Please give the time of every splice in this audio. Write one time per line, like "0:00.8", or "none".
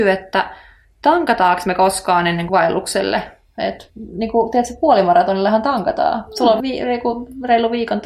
0:02.5
0:03.9
0:06.6